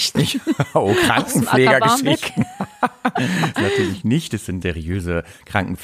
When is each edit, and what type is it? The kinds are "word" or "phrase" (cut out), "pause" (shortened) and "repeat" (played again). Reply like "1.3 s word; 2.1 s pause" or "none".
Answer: 3.5 s phrase; 4.6 s word